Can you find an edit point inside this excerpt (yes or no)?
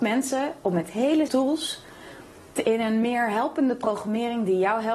yes